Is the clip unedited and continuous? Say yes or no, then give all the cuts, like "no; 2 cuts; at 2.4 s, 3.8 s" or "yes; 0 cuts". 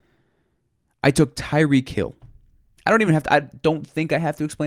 yes; 0 cuts